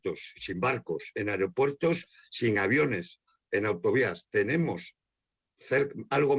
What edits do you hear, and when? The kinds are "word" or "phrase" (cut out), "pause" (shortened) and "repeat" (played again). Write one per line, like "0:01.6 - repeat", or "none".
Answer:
none